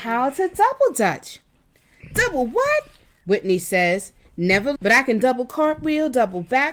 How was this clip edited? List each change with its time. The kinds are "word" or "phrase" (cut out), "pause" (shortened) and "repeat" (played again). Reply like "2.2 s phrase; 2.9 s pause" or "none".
4.8 s word